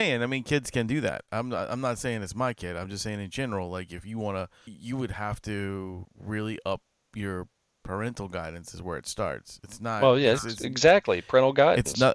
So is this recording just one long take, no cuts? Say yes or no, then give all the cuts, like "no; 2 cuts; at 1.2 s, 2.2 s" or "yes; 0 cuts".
yes; 0 cuts